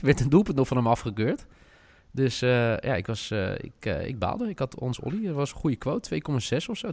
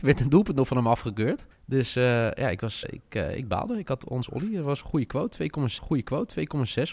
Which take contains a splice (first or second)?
second